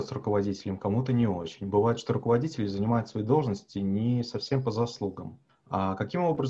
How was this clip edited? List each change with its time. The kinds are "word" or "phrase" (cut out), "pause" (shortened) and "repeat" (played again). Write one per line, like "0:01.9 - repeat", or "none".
0:05.5 - pause